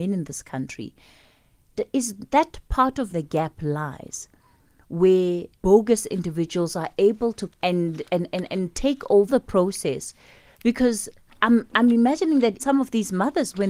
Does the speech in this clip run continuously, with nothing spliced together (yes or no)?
no